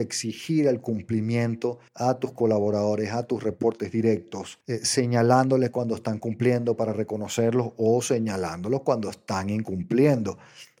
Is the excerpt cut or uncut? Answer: cut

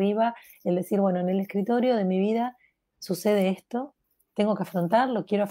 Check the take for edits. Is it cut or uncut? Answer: uncut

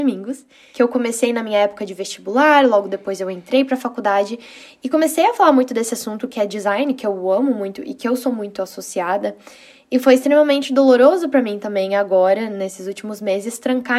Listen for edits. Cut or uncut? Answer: uncut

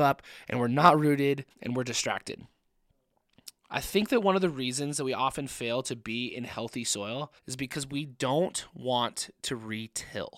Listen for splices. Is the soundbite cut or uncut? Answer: cut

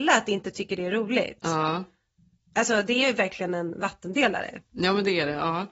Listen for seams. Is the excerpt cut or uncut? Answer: uncut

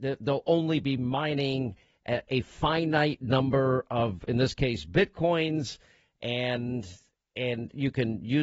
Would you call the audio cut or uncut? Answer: uncut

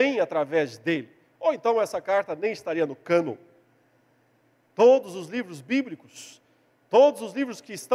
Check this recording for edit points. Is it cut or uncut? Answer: uncut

